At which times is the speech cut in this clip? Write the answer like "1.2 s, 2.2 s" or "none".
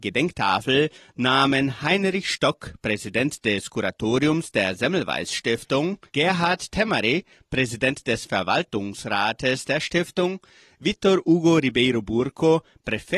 6.1 s

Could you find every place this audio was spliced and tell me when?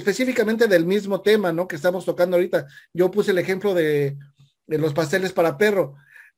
none

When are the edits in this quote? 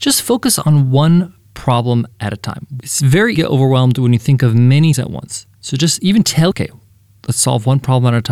3.3 s, 4.9 s, 6.5 s

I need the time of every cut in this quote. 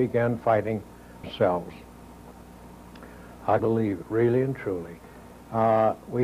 1.2 s, 3.6 s, 4.0 s

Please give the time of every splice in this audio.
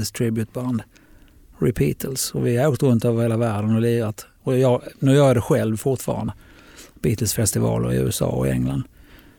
6.3 s

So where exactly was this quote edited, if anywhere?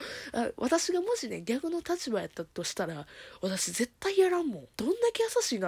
2.5 s, 4.7 s

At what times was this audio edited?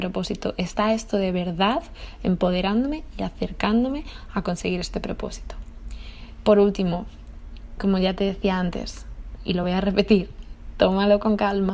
none

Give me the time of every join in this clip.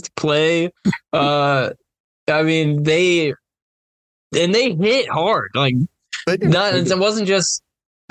none

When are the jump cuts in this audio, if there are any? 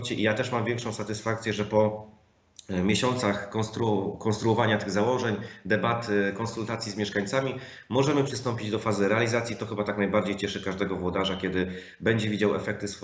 none

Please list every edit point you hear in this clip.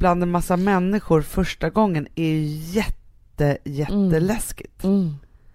none

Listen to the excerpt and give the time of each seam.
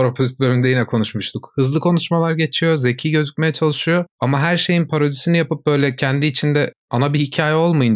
4.1 s

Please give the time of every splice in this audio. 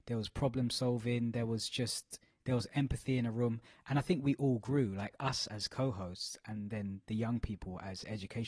none

